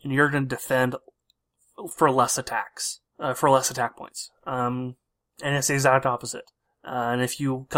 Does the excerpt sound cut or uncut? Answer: cut